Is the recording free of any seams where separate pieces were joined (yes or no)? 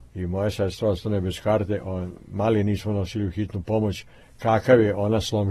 yes